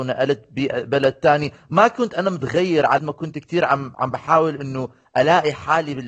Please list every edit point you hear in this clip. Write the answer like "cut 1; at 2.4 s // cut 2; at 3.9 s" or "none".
cut 1; at 3.0 s